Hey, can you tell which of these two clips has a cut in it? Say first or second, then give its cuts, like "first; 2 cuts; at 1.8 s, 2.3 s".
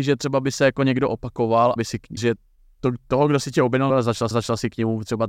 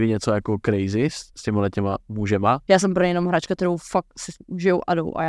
first; 4 cuts; at 1.8 s, 2.2 s, 3.9 s, 4.3 s